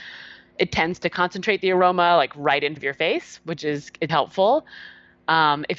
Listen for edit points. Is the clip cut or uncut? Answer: cut